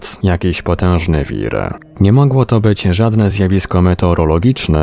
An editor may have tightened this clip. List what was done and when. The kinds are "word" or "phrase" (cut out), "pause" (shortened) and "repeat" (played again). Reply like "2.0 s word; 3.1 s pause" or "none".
none